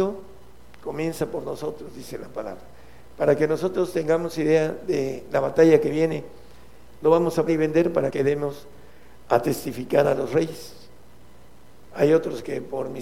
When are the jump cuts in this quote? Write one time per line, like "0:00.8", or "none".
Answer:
0:07.5
0:08.1